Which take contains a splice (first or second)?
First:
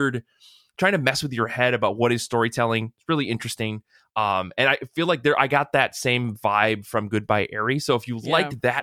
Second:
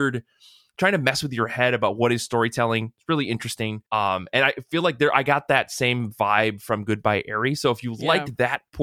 second